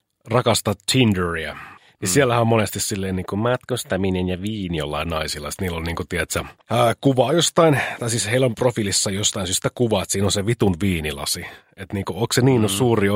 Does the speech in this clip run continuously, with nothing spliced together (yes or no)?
no